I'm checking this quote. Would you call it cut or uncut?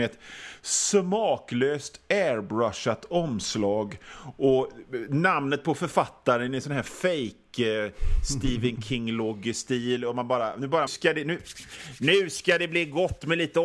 cut